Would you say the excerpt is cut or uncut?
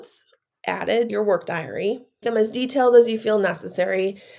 cut